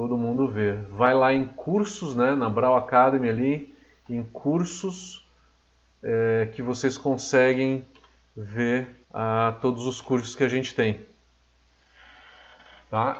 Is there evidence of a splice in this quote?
yes; 1 cut; at 9.0 s

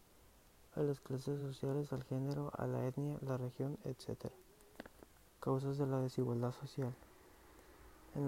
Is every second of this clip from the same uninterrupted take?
yes; 0 cuts

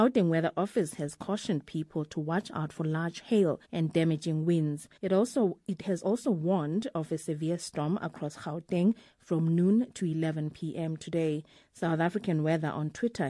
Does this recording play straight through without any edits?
no; 2 cuts; at 3.6 s, 5.0 s

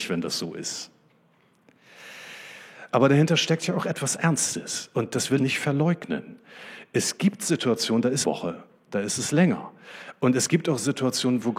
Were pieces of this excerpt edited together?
yes; 2 cuts; at 5.4 s, 8.2 s

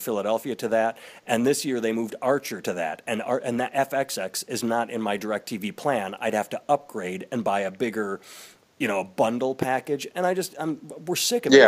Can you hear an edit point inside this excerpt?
no; 0 cuts

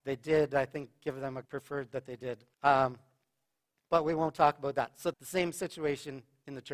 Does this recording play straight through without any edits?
no; 3 cuts; at 1.4 s, 2.5 s, 5.1 s

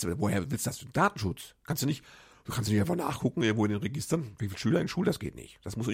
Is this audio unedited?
yes; 0 cuts

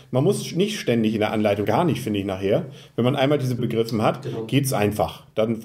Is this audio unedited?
no; 2 cuts; at 1.6 s, 3.6 s

